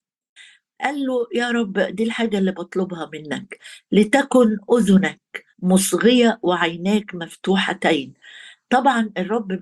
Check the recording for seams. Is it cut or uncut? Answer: cut